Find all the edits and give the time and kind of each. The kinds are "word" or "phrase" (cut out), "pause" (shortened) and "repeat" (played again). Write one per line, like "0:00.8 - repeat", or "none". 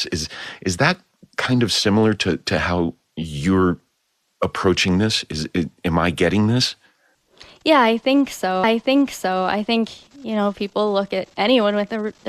0:08.6 - repeat